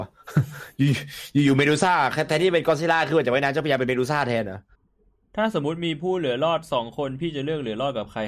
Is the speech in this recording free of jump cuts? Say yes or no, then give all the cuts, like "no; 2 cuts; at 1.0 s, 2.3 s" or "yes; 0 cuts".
no; 1 cut; at 4.8 s